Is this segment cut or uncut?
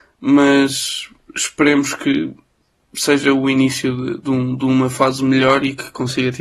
uncut